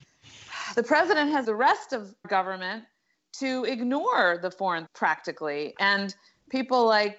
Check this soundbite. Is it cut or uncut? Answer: cut